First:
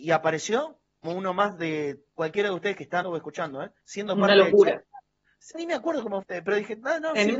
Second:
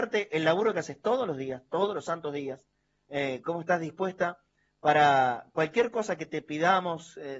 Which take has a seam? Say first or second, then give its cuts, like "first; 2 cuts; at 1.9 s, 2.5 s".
first; 6 cuts; at 1.0 s, 2.1 s, 3.0 s, 3.8 s, 5.5 s, 6.2 s